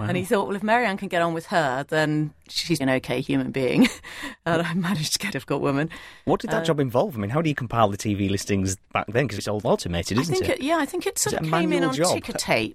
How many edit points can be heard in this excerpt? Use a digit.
3